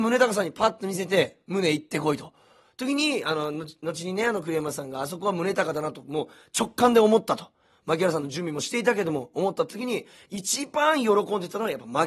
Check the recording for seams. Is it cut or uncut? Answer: uncut